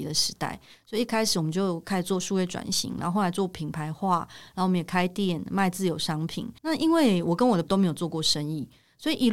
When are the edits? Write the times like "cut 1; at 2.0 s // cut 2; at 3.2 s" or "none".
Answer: cut 1; at 6.6 s // cut 2; at 7.7 s